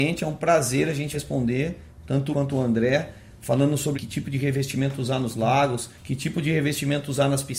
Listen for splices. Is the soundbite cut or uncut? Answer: cut